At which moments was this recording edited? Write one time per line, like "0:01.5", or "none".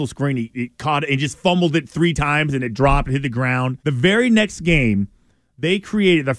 0:03.8